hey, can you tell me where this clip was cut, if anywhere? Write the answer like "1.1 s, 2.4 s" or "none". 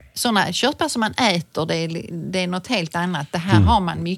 none